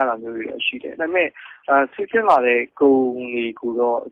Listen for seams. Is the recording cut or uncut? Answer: uncut